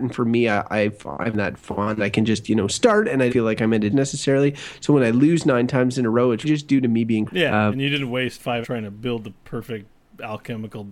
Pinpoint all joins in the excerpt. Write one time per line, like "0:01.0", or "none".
0:01.3
0:02.0
0:03.3
0:03.9
0:06.4
0:07.3
0:07.7
0:08.6